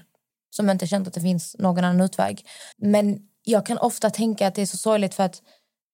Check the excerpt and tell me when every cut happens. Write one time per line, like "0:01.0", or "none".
0:02.7